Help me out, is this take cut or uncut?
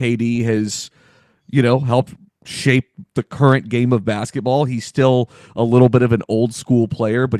uncut